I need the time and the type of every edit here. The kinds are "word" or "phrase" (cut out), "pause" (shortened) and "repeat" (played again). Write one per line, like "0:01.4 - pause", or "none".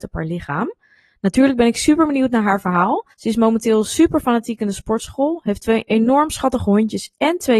0:03.1 - pause

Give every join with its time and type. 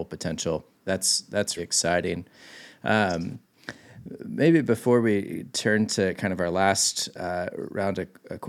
0:01.6 - word

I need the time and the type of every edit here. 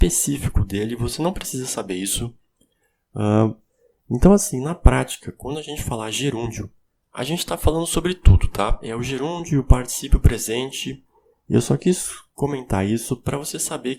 none

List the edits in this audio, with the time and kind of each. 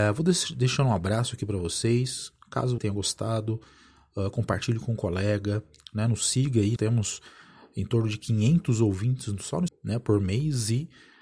0:02.8 - word
0:06.8 - word
0:09.7 - word

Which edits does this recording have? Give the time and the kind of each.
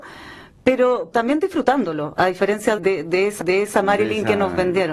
0:01.1 - word
0:02.8 - word
0:03.4 - repeat

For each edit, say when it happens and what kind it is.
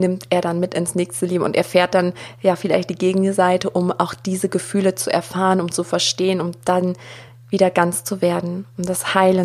none

